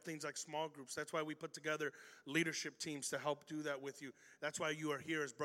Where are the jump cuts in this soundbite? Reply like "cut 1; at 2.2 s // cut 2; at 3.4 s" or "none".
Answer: none